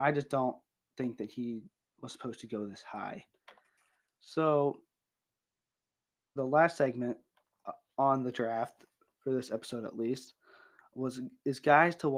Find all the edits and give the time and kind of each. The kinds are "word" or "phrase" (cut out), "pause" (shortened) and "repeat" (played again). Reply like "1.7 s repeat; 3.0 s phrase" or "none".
6.4 s word